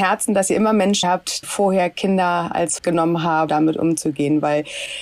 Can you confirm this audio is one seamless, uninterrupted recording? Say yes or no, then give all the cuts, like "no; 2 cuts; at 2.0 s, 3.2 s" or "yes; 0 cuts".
no; 4 cuts; at 1.0 s, 1.4 s, 2.8 s, 3.5 s